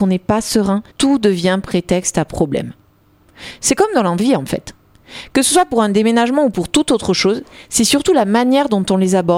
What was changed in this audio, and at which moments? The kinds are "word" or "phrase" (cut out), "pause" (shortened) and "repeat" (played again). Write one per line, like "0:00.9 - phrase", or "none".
0:00.9 - pause